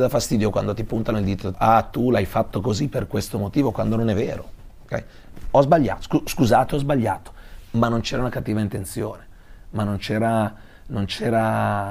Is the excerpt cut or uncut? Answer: cut